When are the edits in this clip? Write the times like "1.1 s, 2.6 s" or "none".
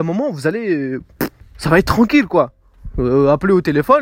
1.4 s